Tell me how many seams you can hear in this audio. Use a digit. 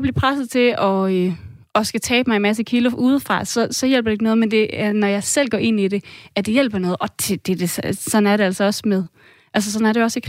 0